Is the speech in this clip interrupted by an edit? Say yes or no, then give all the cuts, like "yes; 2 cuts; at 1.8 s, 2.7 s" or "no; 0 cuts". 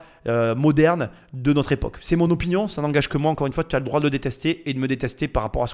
no; 0 cuts